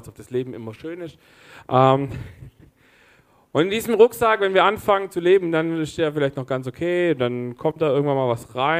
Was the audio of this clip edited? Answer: no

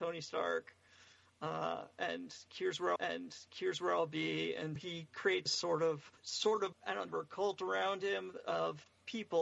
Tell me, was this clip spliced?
yes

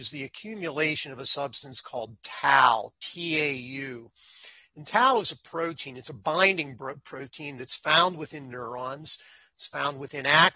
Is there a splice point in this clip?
no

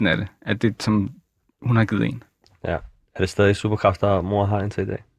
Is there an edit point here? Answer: no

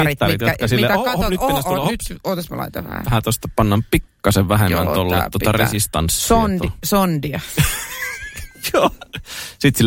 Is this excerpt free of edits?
yes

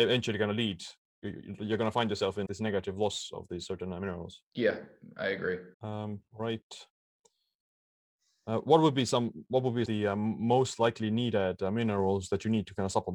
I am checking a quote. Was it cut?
yes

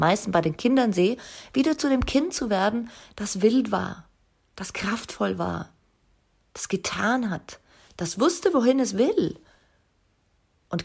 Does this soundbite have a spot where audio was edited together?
no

